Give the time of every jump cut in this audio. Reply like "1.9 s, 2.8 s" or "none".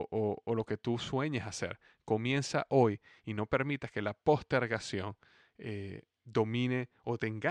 none